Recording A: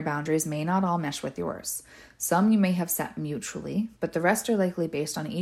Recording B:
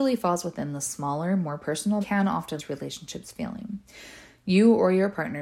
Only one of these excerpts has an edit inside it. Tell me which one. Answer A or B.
B